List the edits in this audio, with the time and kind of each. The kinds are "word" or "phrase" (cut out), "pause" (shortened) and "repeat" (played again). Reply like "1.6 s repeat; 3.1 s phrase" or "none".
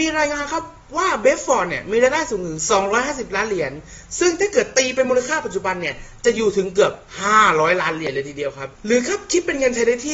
8.7 s pause